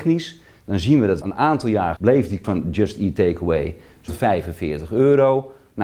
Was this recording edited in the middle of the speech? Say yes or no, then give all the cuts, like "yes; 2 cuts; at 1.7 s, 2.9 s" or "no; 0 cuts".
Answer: yes; 4 cuts; at 1.2 s, 2.0 s, 2.4 s, 4.1 s